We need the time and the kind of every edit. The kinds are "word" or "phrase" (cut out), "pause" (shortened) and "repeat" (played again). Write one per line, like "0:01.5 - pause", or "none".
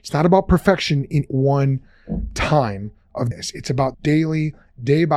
0:01.3 - word
0:03.3 - word
0:03.9 - word